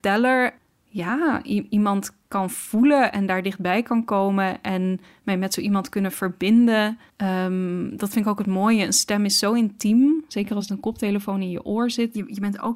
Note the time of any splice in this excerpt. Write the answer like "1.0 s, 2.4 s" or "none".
2.2 s, 7.1 s, 10.7 s